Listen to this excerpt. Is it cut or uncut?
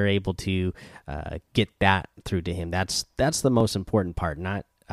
uncut